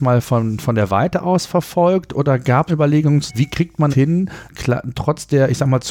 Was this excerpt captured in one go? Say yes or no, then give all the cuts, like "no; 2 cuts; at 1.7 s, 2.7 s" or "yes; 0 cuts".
no; 4 cuts; at 2.7 s, 3.3 s, 3.9 s, 4.5 s